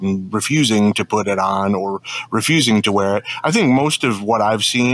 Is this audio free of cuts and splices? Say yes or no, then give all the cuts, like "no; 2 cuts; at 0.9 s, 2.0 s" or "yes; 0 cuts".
yes; 0 cuts